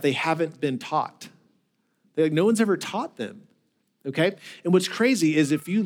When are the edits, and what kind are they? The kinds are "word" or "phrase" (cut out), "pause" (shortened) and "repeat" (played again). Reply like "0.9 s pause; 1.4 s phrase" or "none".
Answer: none